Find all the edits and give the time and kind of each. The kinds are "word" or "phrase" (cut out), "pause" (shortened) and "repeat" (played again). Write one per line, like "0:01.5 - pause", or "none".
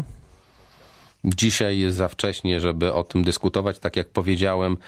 0:01.9 - word